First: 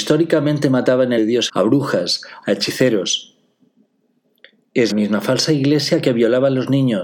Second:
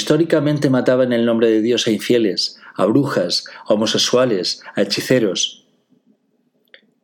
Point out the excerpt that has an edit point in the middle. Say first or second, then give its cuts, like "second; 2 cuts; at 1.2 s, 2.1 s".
first; 4 cuts; at 1.2 s, 1.5 s, 2.4 s, 4.9 s